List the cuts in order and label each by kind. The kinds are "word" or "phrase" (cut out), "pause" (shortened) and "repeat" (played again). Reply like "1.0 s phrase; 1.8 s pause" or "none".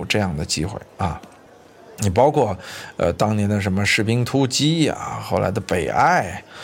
none